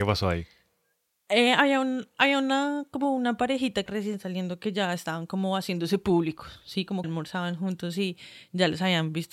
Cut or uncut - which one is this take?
cut